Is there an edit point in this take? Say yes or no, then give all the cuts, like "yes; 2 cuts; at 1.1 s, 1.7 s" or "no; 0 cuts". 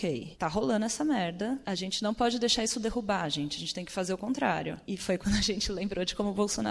no; 0 cuts